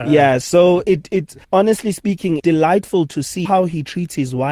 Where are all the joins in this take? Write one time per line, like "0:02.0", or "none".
0:01.4
0:02.4
0:03.5